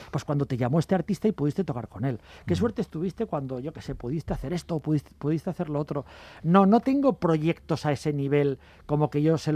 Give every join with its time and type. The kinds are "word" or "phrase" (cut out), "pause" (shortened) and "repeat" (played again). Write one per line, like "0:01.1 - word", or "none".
none